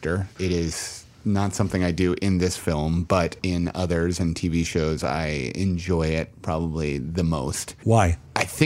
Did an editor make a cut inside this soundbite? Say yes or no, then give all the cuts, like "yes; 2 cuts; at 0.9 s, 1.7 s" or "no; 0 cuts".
no; 0 cuts